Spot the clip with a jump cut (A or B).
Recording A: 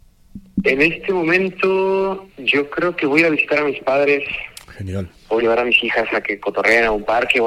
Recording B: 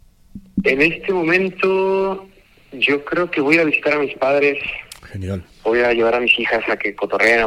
A